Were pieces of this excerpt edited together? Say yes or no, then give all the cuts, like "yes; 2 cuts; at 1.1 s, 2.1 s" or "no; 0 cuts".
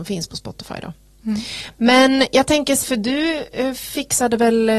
yes; 1 cut; at 2.8 s